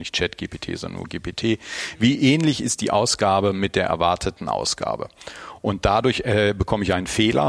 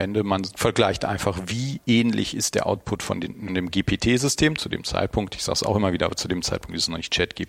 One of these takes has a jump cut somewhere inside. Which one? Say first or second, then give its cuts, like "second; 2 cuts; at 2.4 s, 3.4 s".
second; 1 cut; at 3.5 s